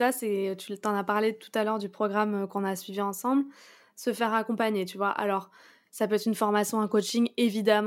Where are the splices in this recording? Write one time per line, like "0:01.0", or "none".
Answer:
none